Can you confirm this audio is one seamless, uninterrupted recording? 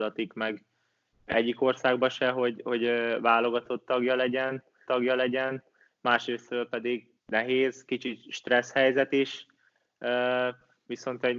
no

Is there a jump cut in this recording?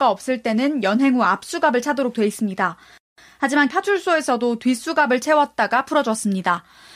yes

